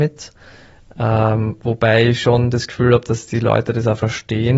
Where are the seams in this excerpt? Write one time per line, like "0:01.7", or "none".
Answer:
none